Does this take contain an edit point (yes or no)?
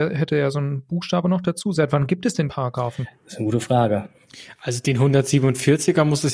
yes